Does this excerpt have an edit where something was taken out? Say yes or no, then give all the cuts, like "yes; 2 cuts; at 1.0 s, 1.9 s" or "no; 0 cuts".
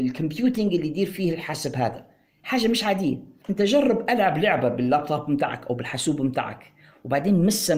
no; 0 cuts